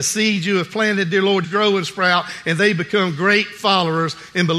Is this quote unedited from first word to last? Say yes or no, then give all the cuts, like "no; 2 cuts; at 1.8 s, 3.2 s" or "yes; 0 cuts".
no; 1 cut; at 1.4 s